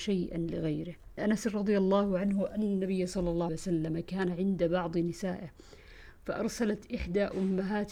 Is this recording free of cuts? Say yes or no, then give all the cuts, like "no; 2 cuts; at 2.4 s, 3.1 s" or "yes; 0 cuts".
no; 2 cuts; at 1.2 s, 3.5 s